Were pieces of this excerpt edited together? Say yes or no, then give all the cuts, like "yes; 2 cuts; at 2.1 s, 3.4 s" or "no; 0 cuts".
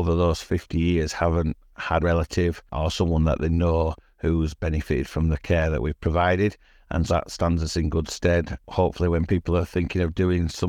yes; 2 cuts; at 2.0 s, 7.1 s